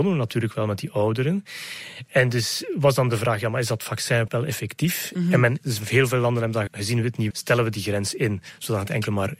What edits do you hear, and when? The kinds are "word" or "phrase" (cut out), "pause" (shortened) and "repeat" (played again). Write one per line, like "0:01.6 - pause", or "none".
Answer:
0:04.3 - word
0:06.7 - word
0:07.3 - word